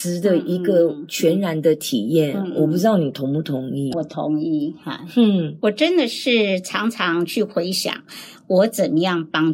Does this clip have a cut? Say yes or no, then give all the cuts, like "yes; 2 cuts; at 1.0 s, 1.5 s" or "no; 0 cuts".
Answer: yes; 1 cut; at 3.9 s